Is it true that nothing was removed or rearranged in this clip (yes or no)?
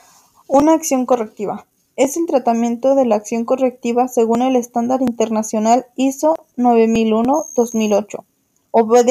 yes